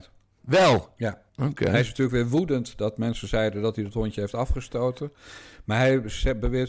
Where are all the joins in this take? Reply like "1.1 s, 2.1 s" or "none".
1.3 s

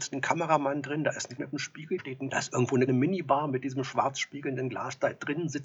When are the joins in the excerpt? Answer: 1.4 s, 2.0 s, 2.3 s, 2.9 s

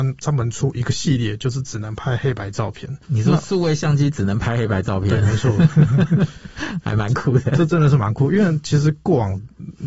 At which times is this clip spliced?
3.0 s

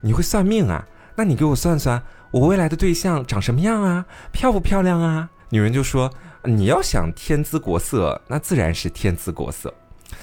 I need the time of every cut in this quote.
5.4 s

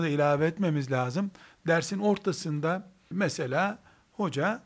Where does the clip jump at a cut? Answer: 3.1 s

